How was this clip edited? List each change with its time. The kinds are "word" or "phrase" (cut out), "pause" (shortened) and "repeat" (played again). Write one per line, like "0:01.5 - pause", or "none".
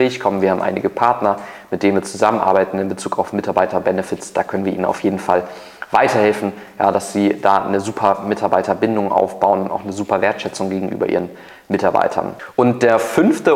none